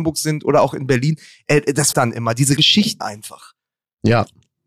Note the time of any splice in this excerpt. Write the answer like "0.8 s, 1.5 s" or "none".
1.9 s, 2.6 s, 3.0 s